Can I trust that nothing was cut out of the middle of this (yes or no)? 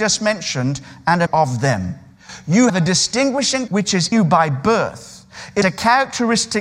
no